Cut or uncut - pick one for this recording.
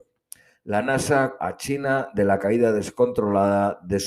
cut